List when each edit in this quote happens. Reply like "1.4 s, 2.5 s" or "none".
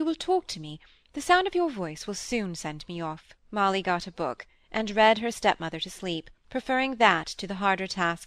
3.4 s, 6.4 s